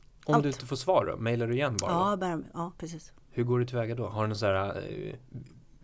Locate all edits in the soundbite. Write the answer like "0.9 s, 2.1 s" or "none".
none